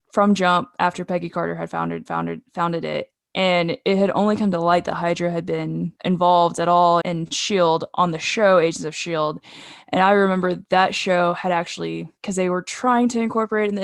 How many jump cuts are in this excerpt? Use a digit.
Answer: 4